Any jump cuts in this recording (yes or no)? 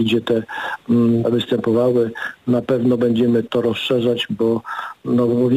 yes